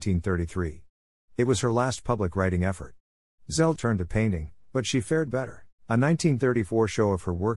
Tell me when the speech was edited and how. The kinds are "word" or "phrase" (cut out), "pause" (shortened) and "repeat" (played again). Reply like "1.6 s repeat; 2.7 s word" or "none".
3.8 s word; 5.3 s word; 5.8 s pause